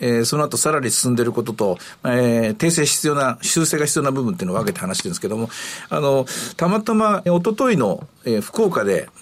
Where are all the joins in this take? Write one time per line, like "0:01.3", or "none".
0:07.3